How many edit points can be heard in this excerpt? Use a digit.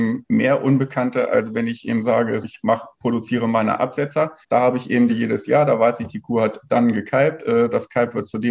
3